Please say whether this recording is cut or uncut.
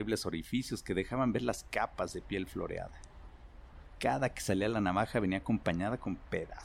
uncut